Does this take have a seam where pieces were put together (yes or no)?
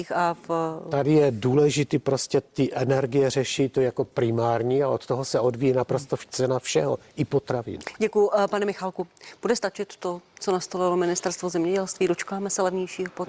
no